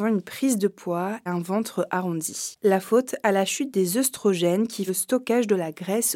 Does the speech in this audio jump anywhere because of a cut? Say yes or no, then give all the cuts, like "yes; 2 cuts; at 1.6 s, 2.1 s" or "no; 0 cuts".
yes; 2 cuts; at 1.3 s, 4.9 s